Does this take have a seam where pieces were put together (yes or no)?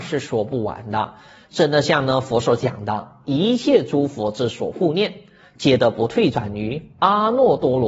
no